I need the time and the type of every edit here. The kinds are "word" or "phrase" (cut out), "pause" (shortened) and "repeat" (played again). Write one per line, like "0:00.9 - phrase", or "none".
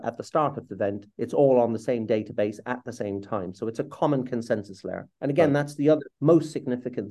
0:01.1 - pause
0:05.1 - pause
0:06.1 - pause